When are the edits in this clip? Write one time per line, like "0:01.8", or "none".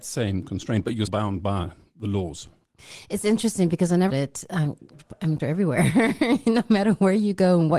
0:01.1
0:04.1
0:05.4